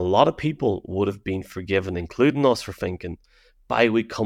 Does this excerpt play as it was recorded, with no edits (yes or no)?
yes